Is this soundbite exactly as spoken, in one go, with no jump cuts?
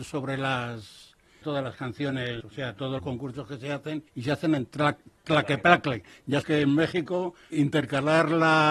no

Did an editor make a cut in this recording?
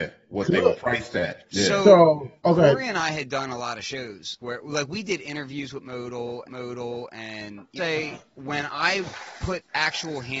yes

